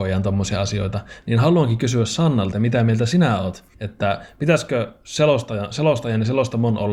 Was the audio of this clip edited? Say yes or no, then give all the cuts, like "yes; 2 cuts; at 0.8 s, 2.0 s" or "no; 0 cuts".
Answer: yes; 2 cuts; at 2.5 s, 3.7 s